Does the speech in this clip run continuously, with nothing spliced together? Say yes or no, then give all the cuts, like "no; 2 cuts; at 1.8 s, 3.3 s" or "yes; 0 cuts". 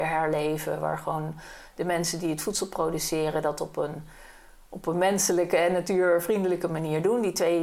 yes; 0 cuts